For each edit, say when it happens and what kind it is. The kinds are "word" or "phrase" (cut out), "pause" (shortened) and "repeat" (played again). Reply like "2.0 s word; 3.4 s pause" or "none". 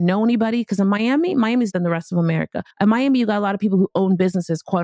1.7 s word; 2.7 s pause